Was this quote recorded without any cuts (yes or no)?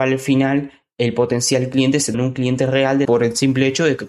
no